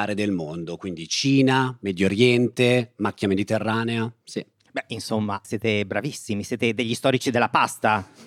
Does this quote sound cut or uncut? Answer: cut